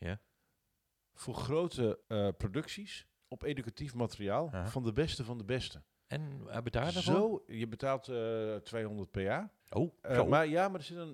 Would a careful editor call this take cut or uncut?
cut